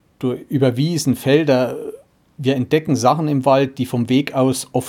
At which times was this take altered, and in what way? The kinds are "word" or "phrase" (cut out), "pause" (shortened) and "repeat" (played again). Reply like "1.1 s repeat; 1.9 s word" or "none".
none